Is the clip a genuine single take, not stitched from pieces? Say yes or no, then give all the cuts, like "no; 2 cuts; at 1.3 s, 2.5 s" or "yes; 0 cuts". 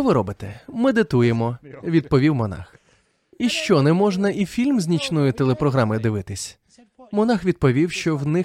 yes; 0 cuts